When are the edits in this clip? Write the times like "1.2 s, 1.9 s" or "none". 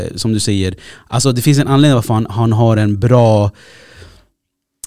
none